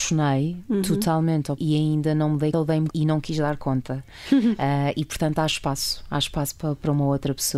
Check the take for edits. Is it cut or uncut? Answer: cut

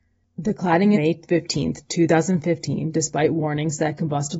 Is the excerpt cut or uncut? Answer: cut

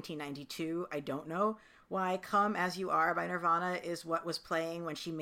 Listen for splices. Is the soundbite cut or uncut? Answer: uncut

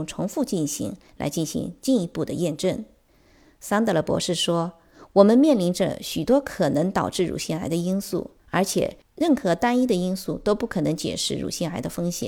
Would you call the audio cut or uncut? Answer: cut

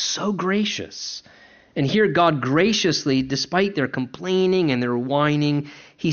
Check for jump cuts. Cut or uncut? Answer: uncut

